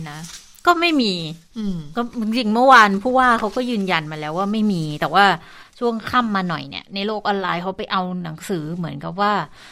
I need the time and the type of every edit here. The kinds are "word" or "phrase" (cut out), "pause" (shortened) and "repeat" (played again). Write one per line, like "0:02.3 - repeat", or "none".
none